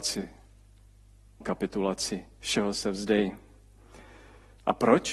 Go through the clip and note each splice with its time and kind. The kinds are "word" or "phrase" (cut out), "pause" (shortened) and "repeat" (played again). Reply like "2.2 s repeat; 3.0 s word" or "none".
1.4 s word